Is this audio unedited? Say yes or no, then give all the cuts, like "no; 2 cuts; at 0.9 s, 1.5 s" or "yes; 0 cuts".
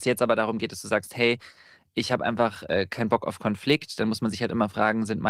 yes; 0 cuts